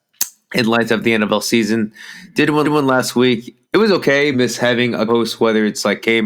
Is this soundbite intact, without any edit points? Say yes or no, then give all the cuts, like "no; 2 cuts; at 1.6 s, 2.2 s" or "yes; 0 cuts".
no; 4 cuts; at 2.6 s, 3.6 s, 4.3 s, 5.1 s